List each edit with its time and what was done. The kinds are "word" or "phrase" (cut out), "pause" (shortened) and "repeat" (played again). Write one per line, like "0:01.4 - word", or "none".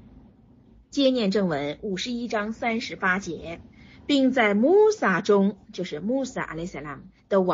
0:03.7 - pause
0:05.6 - pause